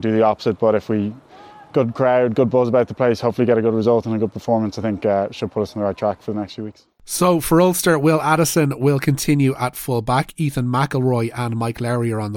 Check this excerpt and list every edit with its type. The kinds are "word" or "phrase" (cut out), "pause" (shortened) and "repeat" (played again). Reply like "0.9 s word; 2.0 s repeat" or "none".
none